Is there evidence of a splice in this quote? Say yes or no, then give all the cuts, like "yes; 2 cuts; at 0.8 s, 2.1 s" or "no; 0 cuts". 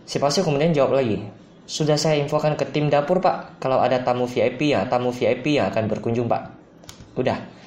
yes; 1 cut; at 4.9 s